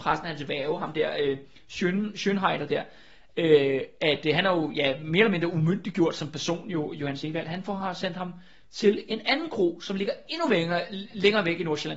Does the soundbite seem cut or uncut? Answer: uncut